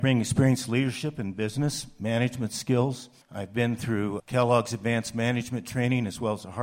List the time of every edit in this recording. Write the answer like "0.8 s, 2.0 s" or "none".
3.2 s, 4.2 s